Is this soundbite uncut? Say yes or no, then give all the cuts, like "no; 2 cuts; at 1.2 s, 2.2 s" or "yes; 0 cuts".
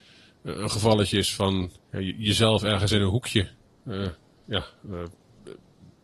yes; 0 cuts